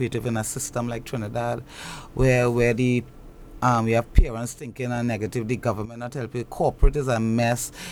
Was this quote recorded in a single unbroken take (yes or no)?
yes